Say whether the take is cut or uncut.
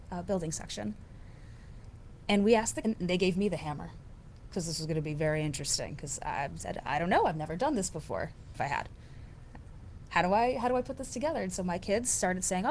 cut